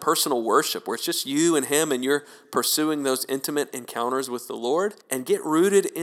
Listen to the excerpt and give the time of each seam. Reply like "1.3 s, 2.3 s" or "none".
5.0 s